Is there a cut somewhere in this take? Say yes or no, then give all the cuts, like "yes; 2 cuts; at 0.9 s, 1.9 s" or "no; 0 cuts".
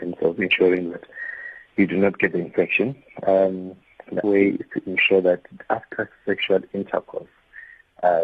yes; 1 cut; at 4.2 s